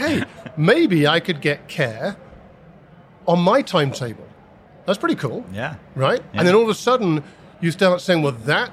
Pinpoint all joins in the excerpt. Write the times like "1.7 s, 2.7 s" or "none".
none